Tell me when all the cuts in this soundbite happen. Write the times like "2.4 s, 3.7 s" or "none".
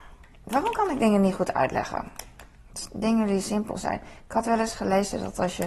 none